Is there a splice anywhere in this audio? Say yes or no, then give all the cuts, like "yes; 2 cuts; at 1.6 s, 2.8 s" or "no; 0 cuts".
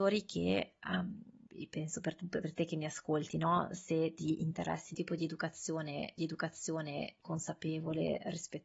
yes; 3 cuts; at 1.5 s, 4.9 s, 6.2 s